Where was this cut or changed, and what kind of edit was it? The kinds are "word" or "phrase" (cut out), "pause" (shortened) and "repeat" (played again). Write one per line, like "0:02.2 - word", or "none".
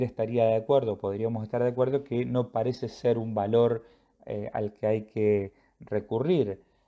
none